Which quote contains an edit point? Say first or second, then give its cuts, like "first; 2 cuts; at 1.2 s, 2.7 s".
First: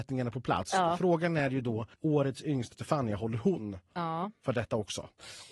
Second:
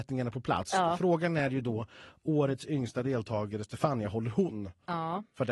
first; 2 cuts; at 1.9 s, 2.7 s